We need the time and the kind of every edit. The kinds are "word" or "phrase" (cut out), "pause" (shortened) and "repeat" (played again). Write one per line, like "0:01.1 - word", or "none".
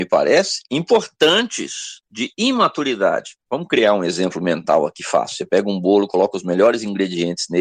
none